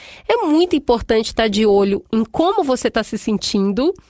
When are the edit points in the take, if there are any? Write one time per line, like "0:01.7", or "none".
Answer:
none